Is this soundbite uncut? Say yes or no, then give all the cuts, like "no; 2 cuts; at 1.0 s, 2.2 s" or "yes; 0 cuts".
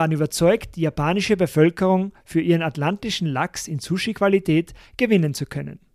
yes; 0 cuts